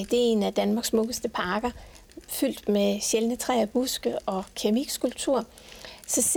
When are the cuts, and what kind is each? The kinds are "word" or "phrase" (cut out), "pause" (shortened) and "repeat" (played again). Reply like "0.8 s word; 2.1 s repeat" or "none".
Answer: none